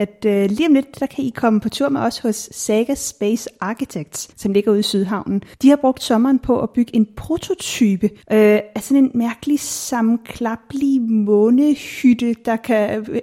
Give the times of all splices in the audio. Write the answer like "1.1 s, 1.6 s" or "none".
4.3 s, 5.5 s, 8.2 s